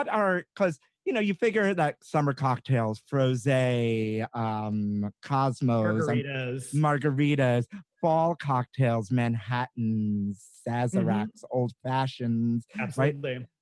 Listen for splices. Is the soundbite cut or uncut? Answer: uncut